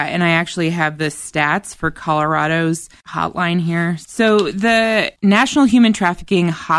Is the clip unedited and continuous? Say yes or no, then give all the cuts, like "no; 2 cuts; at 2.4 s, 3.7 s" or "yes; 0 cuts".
no; 1 cut; at 5.2 s